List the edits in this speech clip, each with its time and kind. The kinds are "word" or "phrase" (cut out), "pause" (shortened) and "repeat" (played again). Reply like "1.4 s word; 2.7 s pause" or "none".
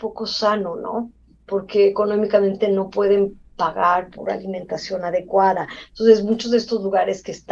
none